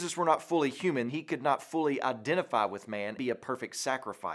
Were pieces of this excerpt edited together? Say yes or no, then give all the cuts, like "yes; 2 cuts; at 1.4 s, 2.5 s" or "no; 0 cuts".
yes; 2 cuts; at 1.1 s, 3.2 s